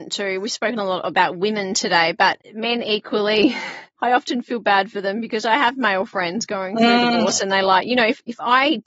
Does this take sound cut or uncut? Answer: uncut